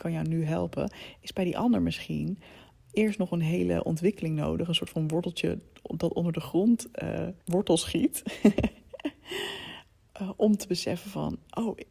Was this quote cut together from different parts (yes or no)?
yes